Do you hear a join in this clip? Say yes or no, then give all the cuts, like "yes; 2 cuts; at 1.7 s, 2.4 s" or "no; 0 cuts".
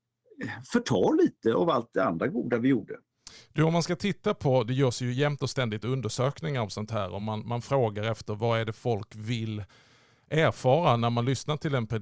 no; 0 cuts